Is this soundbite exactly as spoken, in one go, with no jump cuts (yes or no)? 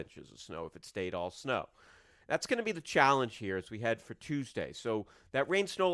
yes